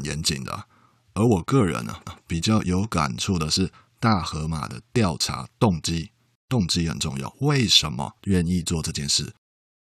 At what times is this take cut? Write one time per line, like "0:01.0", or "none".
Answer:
0:02.1
0:08.2